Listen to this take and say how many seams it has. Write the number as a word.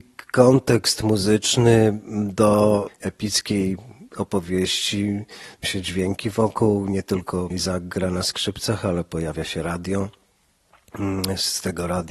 two